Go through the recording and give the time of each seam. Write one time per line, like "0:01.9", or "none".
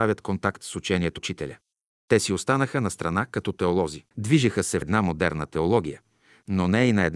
0:01.2
0:04.1
0:04.8